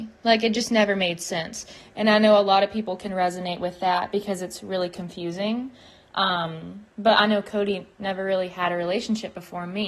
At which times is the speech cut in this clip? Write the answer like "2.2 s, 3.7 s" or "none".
none